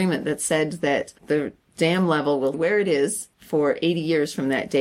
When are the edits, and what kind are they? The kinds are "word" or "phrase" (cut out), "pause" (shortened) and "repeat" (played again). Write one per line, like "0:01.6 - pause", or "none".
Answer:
0:01.2 - pause
0:02.5 - word
0:03.3 - pause